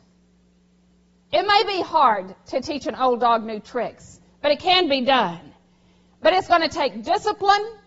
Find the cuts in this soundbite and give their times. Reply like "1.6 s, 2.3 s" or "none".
none

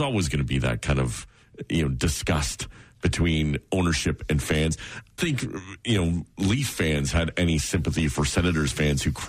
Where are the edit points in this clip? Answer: 5.2 s

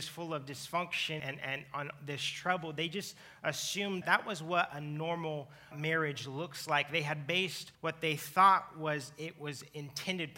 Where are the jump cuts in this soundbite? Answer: 1.2 s, 4.0 s, 5.7 s, 7.7 s

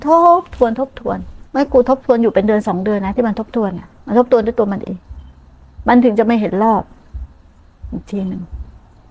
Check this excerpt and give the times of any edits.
1.5 s

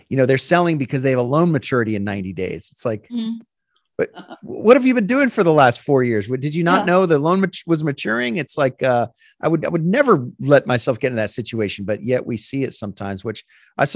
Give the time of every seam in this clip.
none

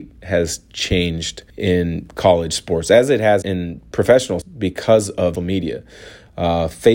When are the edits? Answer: 1.5 s, 3.4 s, 4.4 s, 5.4 s

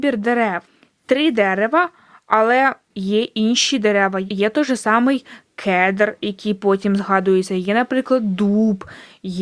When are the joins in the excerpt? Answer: none

